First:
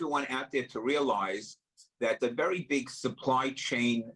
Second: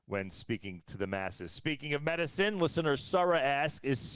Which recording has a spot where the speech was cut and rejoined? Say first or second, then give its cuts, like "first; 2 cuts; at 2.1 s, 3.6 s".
first; 1 cut; at 2.2 s